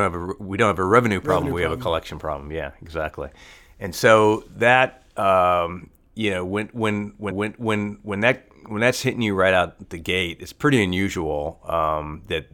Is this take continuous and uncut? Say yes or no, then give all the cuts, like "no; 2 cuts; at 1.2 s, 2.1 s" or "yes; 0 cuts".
no; 1 cut; at 7.3 s